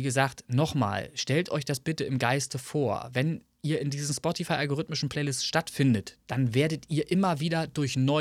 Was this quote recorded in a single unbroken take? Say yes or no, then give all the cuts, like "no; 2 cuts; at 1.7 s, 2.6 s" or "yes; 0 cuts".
yes; 0 cuts